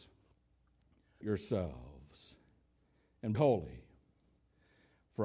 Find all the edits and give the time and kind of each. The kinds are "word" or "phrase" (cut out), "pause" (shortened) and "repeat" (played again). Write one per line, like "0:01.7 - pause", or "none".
0:01.2 - word
0:03.3 - word